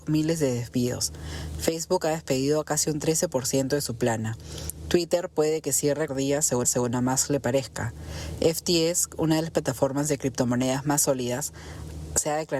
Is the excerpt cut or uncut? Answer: cut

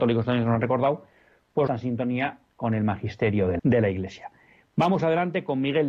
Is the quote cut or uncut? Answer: cut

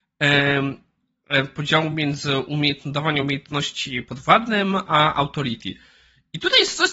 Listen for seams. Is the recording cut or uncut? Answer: uncut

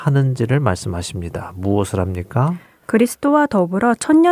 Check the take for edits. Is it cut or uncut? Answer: uncut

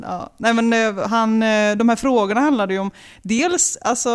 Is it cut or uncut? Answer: uncut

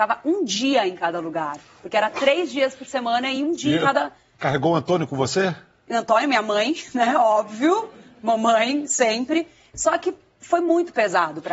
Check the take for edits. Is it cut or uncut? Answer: uncut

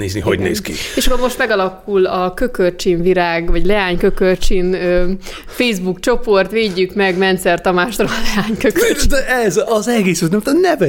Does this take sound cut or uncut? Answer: uncut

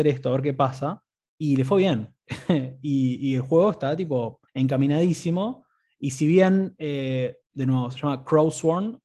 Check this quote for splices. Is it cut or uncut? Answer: cut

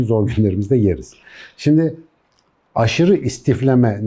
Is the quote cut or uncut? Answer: uncut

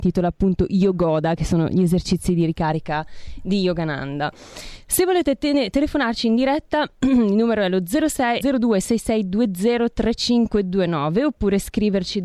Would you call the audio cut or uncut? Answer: cut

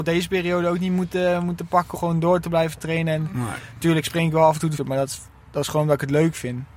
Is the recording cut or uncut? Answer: cut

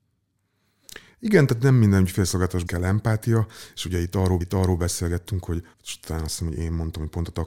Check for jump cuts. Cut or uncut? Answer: cut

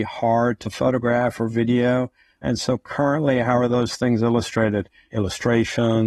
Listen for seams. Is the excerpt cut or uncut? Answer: uncut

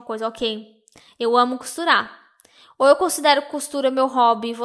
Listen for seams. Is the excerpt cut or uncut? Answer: uncut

